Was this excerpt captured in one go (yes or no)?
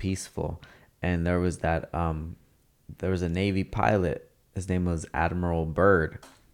yes